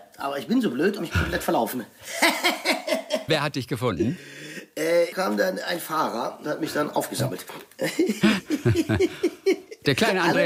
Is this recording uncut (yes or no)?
no